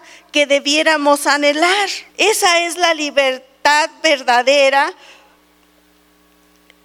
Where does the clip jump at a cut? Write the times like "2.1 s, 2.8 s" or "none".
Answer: 2.1 s